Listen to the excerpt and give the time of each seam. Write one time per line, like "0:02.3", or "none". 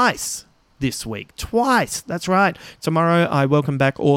none